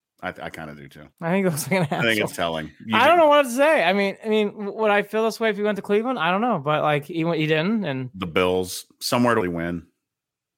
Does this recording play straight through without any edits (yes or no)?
no